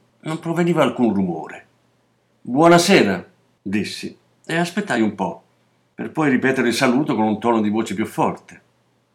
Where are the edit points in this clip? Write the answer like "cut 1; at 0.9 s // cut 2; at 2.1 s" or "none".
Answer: none